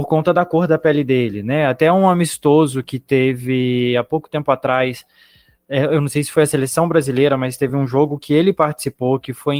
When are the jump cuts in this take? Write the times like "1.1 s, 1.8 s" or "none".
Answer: none